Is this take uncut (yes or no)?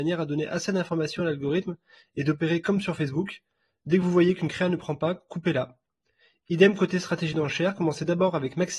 yes